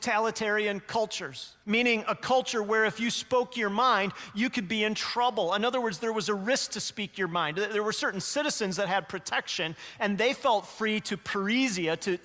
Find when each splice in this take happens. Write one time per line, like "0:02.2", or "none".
0:01.6